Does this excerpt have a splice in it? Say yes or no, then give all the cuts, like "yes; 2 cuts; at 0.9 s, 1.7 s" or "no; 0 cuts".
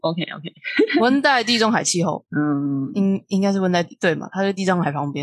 no; 0 cuts